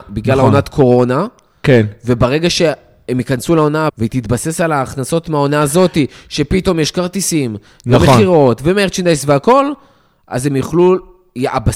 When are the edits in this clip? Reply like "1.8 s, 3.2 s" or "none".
3.9 s